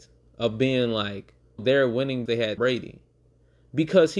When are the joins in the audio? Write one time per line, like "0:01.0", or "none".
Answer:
0:01.6
0:02.3
0:02.6